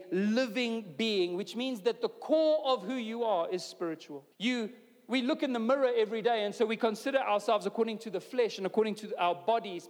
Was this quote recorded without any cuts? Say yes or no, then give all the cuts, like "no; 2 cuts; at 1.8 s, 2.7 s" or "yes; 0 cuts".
no; 1 cut; at 4.3 s